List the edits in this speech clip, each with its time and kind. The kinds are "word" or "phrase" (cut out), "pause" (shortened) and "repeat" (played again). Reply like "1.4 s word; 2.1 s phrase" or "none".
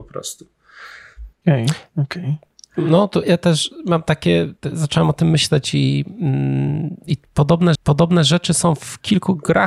1.3 s pause; 3.2 s word; 7.7 s repeat